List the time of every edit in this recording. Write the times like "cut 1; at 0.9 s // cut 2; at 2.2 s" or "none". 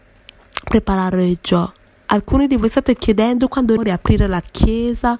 cut 1; at 3.8 s

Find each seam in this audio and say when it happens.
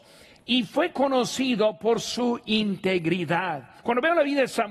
cut 1; at 3.8 s

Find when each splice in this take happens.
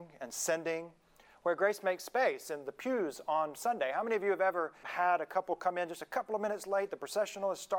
cut 1; at 4.8 s

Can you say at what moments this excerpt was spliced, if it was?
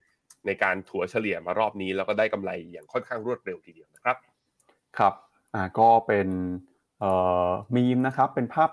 none

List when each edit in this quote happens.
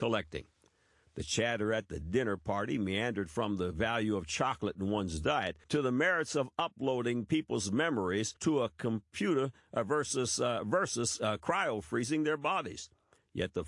cut 1; at 5.6 s // cut 2; at 8.4 s

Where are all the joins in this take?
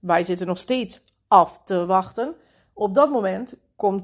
none

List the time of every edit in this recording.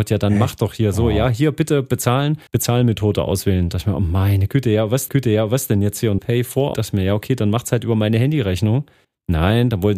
cut 1; at 2.5 s // cut 2; at 5.1 s // cut 3; at 6.2 s // cut 4; at 6.7 s // cut 5; at 9.0 s

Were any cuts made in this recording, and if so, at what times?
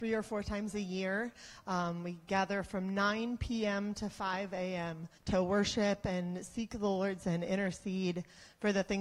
cut 1; at 5.2 s // cut 2; at 7.2 s

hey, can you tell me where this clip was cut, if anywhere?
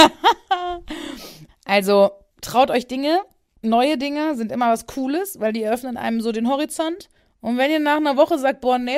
none

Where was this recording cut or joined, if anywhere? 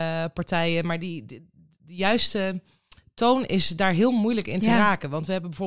none

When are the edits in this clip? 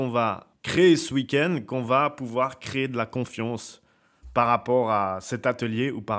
none

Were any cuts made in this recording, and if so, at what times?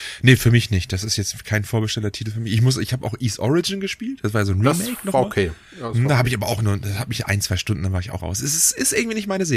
cut 1; at 8.2 s

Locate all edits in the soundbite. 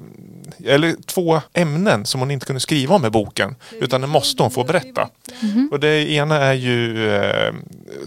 cut 1; at 1.5 s

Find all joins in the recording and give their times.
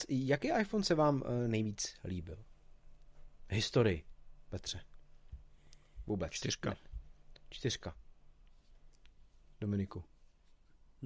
none

